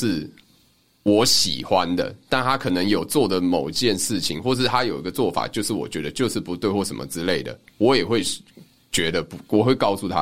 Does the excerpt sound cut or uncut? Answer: uncut